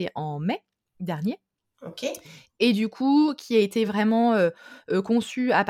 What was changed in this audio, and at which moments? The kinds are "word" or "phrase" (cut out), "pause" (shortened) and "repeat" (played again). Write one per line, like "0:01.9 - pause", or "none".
none